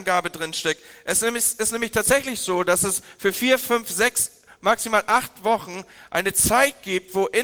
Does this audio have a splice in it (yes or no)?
no